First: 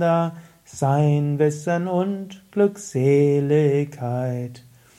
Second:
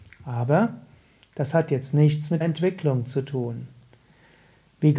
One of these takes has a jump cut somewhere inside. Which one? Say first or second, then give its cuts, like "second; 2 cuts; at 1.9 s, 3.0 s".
second; 1 cut; at 2.4 s